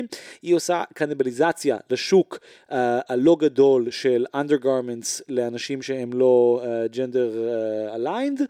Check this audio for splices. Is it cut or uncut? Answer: uncut